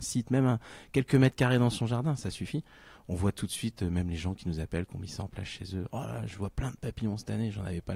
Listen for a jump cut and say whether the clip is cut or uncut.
uncut